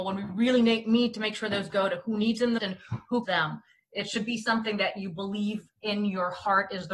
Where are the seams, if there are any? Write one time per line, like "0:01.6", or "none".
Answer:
0:01.7
0:02.6
0:03.2